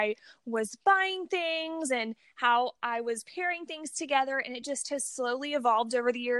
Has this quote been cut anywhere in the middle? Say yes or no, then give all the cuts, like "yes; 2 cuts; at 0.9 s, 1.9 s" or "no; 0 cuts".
no; 0 cuts